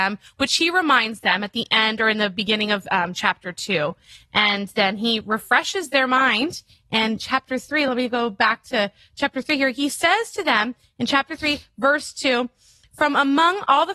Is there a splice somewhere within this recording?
no; 0 cuts

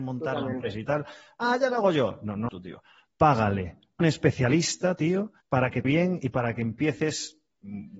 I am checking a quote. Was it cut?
yes; 4 cuts; at 2.5 s, 4.0 s, 5.4 s, 5.8 s

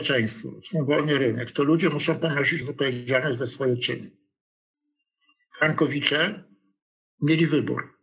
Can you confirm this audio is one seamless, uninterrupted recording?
yes; 0 cuts

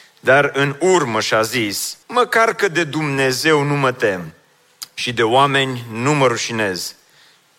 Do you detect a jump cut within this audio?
yes; 1 cut; at 2.0 s

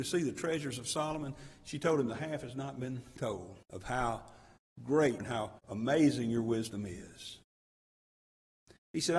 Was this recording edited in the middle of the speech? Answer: yes; 3 cuts; at 3.6 s, 5.2 s, 5.6 s

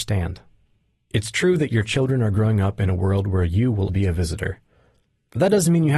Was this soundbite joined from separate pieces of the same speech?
yes; 1 cut; at 3.9 s

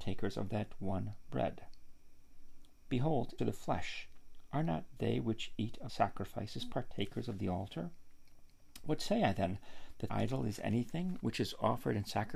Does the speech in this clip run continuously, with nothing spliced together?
no; 4 cuts; at 3.4 s, 5.9 s, 10.1 s, 11.2 s

